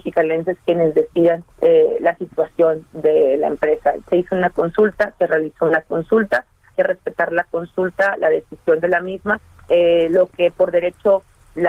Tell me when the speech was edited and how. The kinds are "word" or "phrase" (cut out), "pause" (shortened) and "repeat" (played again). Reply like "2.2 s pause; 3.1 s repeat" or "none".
1.5 s pause; 6.7 s word; 9.6 s phrase